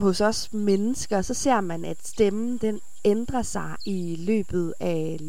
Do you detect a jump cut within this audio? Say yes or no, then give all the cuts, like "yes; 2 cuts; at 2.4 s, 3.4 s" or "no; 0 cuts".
no; 0 cuts